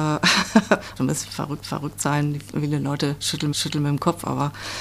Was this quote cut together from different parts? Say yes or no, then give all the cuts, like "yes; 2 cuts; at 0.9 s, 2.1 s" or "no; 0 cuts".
yes; 3 cuts; at 1.0 s, 1.6 s, 3.5 s